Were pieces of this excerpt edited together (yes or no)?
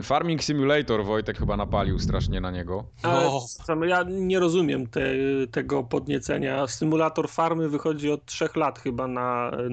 yes